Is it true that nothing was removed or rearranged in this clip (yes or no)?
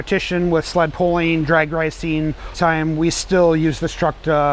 no